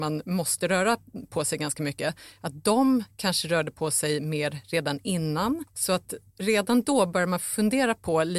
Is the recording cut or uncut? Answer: cut